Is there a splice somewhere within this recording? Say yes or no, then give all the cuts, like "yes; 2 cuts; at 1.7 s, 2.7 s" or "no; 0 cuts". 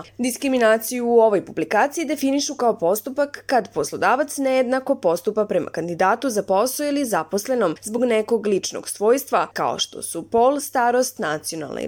no; 0 cuts